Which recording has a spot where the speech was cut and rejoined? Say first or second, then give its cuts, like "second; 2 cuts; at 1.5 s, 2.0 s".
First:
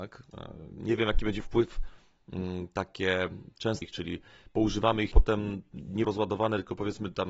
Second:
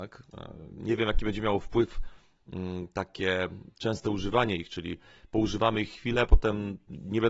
first; 4 cuts; at 1.4 s, 3.8 s, 5.1 s, 6.0 s